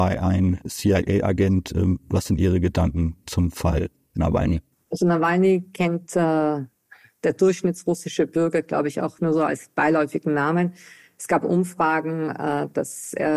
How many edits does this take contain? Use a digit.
1